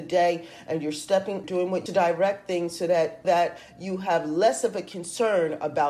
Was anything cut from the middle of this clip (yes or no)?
yes